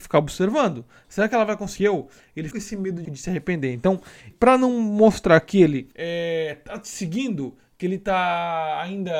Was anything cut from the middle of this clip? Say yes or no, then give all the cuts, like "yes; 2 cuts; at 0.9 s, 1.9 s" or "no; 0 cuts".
yes; 5 cuts; at 1.8 s, 2.5 s, 3.0 s, 4.3 s, 5.9 s